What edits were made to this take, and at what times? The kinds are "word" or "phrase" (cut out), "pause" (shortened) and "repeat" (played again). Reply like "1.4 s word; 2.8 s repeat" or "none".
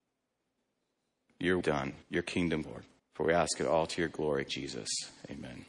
1.6 s phrase; 2.0 s pause; 2.6 s word; 3.0 s pause; 4.5 s word